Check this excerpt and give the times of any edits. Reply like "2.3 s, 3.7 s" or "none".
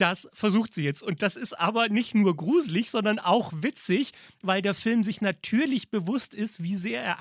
none